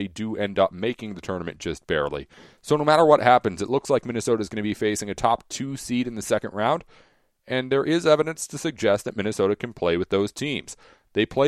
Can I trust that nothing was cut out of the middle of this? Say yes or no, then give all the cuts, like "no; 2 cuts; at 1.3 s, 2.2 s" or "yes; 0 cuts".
yes; 0 cuts